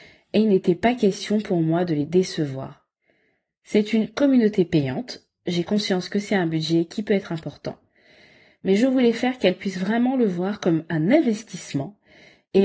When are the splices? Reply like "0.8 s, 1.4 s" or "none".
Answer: none